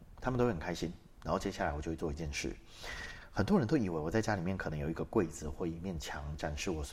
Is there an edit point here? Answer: no; 0 cuts

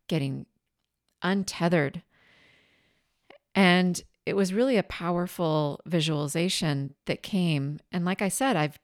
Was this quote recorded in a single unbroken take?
yes; 0 cuts

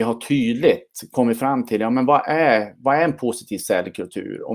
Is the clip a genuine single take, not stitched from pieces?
yes; 0 cuts

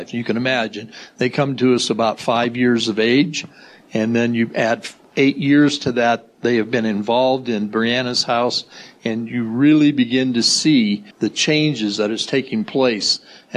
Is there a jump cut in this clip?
yes; 1 cut; at 11.1 s

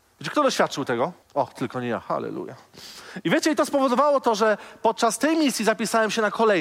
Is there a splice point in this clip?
yes; 1 cut; at 1.2 s

